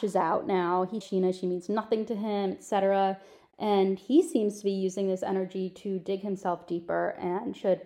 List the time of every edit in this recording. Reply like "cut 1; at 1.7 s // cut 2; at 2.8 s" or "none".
cut 1; at 1.0 s